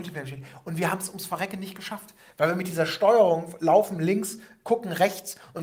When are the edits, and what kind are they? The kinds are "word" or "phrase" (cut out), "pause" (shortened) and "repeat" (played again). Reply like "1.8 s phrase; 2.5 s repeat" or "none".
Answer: none